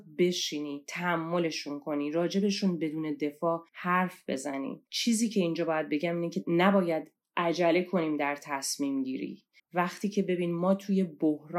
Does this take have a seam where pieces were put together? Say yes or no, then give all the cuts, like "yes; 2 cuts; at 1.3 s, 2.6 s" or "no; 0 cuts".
yes; 3 cuts; at 3.7 s, 4.9 s, 9.6 s